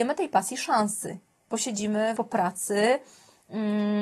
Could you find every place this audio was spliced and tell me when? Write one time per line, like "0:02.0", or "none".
0:02.2